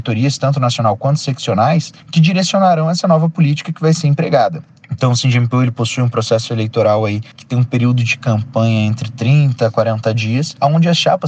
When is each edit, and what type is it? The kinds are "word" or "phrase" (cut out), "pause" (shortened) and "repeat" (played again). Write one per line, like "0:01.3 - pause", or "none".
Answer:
none